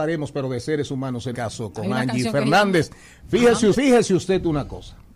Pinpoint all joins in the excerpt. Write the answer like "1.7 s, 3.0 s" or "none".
1.3 s, 3.7 s